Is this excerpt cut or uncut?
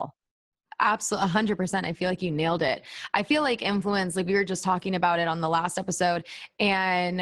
uncut